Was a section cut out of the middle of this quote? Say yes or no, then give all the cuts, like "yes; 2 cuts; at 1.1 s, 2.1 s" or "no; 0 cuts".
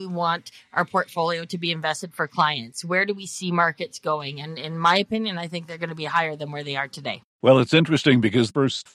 no; 0 cuts